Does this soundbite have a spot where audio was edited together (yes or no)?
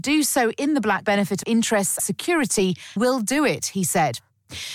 yes